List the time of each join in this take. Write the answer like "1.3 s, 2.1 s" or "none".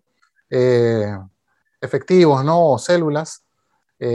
none